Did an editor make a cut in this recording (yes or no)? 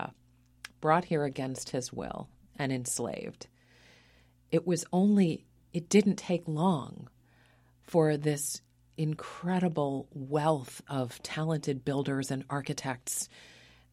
no